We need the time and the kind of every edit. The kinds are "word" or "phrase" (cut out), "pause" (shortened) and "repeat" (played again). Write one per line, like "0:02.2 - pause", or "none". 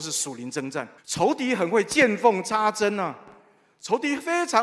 0:01.0 - pause